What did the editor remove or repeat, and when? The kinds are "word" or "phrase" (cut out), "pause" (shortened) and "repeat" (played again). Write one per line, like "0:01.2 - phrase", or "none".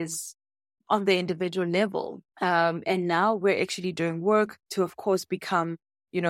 0:02.3 - pause
0:04.6 - pause